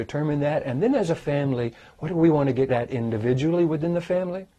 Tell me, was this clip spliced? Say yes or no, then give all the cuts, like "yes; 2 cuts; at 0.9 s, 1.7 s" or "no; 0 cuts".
yes; 1 cut; at 2.7 s